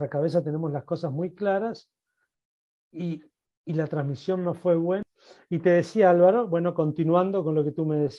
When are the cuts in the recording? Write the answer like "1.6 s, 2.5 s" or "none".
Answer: none